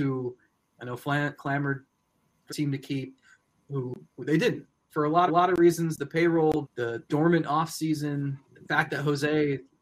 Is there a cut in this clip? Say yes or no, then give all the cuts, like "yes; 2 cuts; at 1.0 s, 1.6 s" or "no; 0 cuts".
yes; 7 cuts; at 1.4 s, 2.5 s, 4.1 s, 4.9 s, 5.3 s, 6.6 s, 8.4 s